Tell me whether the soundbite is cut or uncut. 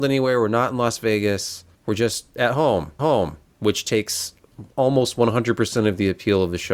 cut